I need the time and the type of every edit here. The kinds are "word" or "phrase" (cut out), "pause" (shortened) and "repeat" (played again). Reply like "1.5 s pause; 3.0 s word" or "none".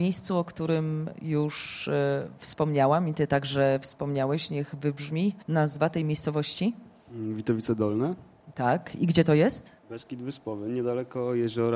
5.4 s pause; 9.8 s pause